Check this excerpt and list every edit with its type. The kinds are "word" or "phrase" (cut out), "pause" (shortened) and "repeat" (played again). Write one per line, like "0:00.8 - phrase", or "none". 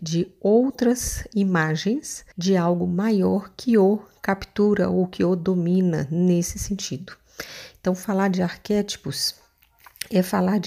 0:02.3 - pause

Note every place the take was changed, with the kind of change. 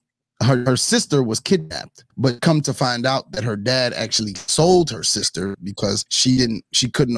0:02.1 - pause
0:06.1 - pause

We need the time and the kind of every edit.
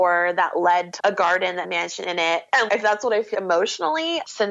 0:01.0 - word
0:01.6 - word
0:02.7 - word
0:03.3 - word

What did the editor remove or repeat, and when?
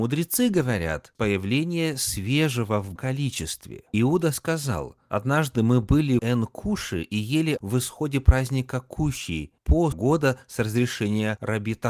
0:01.2 - word
0:03.0 - word
0:03.9 - word
0:06.2 - word
0:07.6 - word
0:09.9 - word

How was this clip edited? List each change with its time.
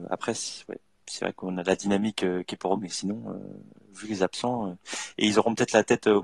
0:02.8 - word

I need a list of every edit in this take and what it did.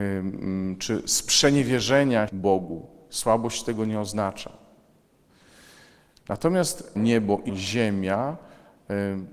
0:02.3 - word
0:07.0 - word
0:07.5 - word

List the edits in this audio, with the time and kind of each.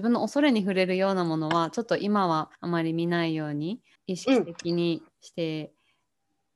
0:02.5 - pause
0:04.0 - pause

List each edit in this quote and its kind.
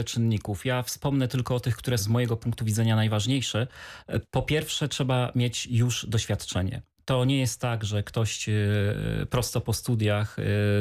0:02.0 - word

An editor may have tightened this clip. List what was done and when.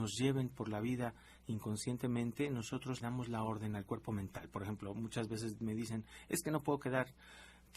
0:03.0 - word

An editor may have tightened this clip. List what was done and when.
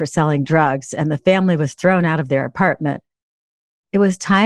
none

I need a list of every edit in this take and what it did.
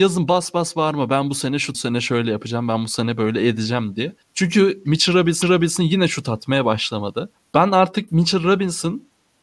0:01.7 - phrase
0:04.2 - pause
0:05.4 - repeat
0:07.4 - pause

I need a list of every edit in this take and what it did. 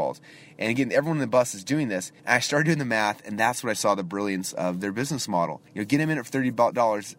0:02.2 - pause
0:05.7 - pause

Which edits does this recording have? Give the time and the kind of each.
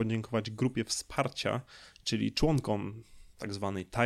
none

